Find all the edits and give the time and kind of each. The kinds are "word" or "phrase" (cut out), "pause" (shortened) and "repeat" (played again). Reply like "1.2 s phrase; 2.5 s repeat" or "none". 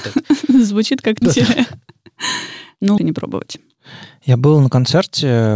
1.2 s phrase; 3.0 s word

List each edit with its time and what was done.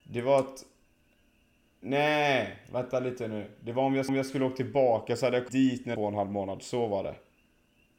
4.1 s repeat; 5.5 s word; 6.0 s phrase

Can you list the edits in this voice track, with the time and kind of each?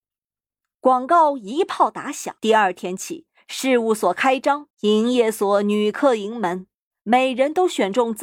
2.4 s pause; 4.7 s pause

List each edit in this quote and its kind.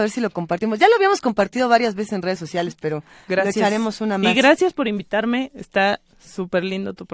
none

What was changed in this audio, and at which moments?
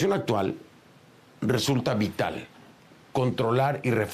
none

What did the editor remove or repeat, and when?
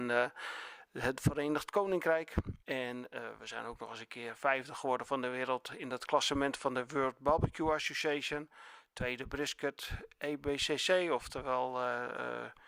2.6 s pause

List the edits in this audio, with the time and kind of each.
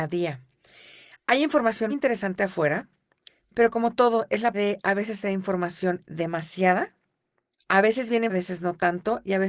1.9 s word; 4.5 s word; 8.3 s word

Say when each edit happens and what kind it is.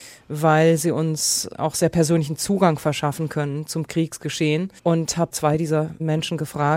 4.8 s pause

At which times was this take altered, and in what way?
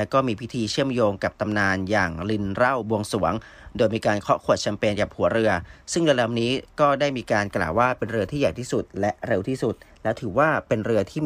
none

